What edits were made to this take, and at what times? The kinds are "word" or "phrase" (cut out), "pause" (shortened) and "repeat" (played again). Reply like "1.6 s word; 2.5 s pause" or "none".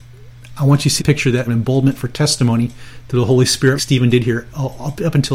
1.0 s word; 1.5 s phrase; 3.8 s word